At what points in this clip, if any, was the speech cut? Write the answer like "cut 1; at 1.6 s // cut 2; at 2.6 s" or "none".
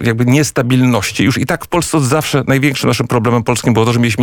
none